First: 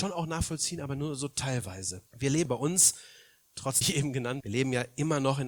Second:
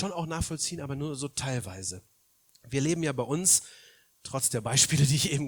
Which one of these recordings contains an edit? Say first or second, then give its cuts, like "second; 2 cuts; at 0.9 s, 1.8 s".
first; 4 cuts; at 2.1 s, 2.5 s, 3.8 s, 4.4 s